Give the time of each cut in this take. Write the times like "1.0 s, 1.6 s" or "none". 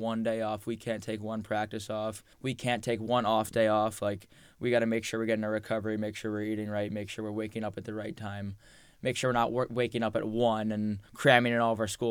2.3 s, 11.1 s